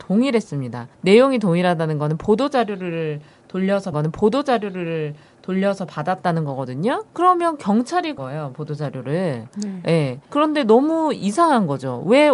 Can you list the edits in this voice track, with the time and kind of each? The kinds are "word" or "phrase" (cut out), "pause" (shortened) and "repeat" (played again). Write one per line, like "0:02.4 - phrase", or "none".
0:00.9 - pause
0:03.9 - repeat
0:07.1 - pause
0:08.2 - word
0:10.2 - pause